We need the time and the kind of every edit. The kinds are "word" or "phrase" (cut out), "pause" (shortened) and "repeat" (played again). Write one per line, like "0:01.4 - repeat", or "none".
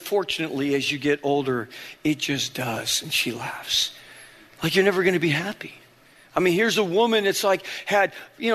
none